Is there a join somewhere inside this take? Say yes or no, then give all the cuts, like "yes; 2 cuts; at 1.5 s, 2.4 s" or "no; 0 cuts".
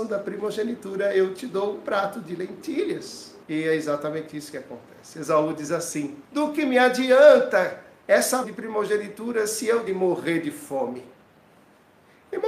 yes; 4 cuts; at 3.4 s, 6.2 s, 8.4 s, 9.9 s